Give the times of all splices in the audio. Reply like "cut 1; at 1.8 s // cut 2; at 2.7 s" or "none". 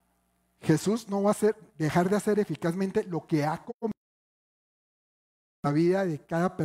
none